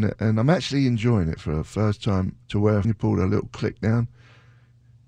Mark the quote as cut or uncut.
cut